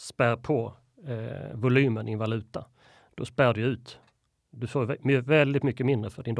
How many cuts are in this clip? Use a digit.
0